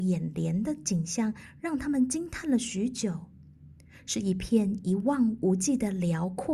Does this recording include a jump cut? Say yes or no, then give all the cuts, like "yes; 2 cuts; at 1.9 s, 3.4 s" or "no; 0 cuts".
no; 0 cuts